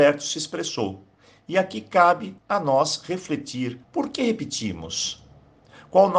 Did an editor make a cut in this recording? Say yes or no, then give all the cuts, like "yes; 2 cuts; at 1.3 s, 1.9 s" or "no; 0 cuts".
yes; 2 cuts; at 2.4 s, 3.8 s